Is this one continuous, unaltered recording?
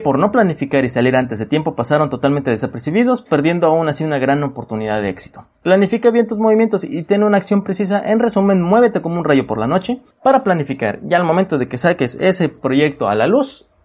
no; 2 cuts; at 5.5 s, 10.1 s

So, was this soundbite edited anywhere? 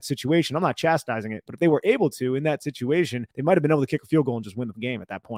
yes; 1 cut; at 3.3 s

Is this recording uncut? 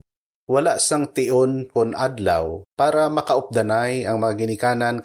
yes; 0 cuts

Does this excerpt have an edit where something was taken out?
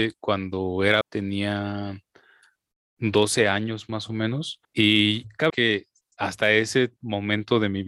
yes; 3 cuts; at 1.0 s, 4.6 s, 5.5 s

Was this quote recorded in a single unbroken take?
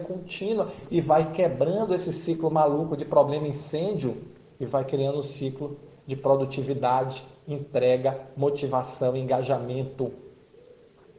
yes; 0 cuts

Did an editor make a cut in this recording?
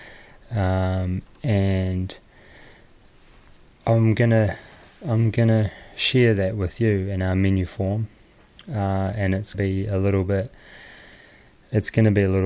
yes; 1 cut; at 9.5 s

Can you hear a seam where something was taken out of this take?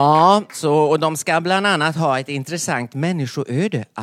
no; 0 cuts

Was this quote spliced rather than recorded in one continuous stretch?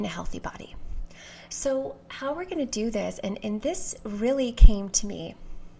no; 0 cuts

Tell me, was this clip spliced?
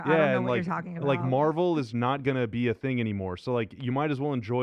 yes; 1 cut; at 1.9 s

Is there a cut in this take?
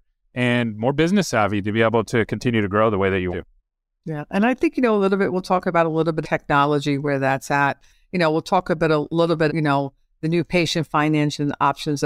yes; 3 cuts; at 3.3 s, 6.2 s, 9.5 s

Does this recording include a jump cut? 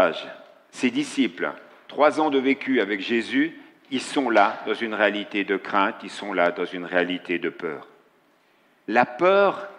no; 0 cuts

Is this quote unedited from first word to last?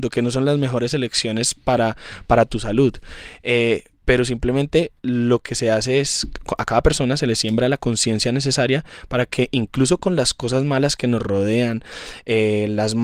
no; 1 cut; at 5.0 s

